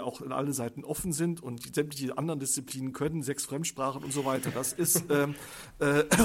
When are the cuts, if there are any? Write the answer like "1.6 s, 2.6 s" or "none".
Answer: none